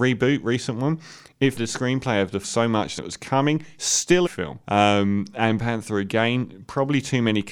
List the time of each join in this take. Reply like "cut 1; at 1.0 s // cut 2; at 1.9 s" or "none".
cut 1; at 1.6 s // cut 2; at 2.4 s // cut 3; at 3.0 s // cut 4; at 4.3 s // cut 5; at 4.6 s // cut 6; at 5.6 s